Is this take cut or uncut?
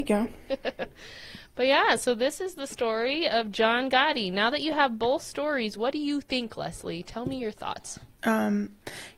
uncut